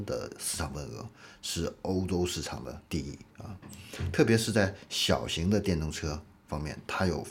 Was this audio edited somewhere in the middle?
yes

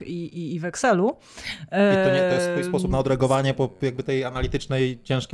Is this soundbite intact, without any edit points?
yes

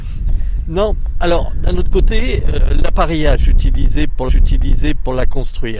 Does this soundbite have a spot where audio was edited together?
yes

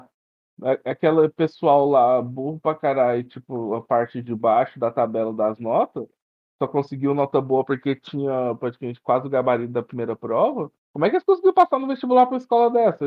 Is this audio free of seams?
yes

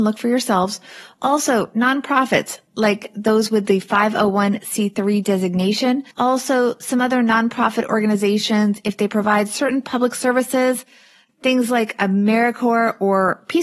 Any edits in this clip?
yes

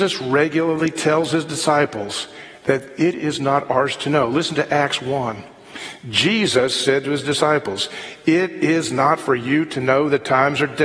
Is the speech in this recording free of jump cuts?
yes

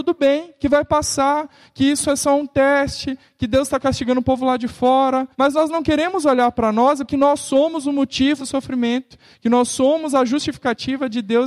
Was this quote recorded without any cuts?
no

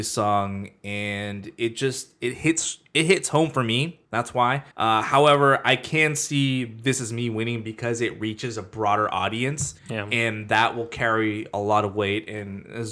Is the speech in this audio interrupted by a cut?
yes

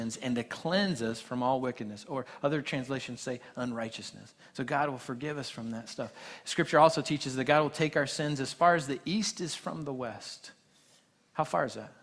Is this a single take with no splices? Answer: yes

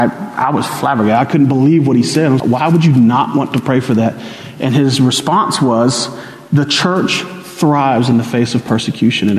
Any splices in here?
yes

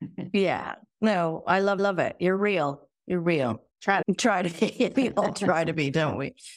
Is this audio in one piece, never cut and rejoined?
no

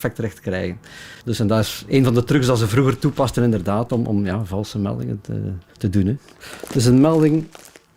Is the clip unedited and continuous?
no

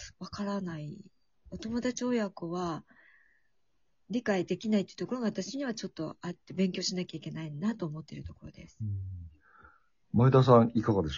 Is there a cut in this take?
no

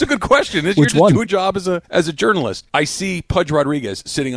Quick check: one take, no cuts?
no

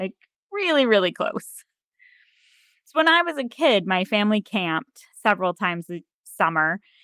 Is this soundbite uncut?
yes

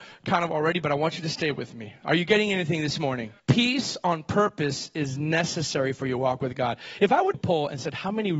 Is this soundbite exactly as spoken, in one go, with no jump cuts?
no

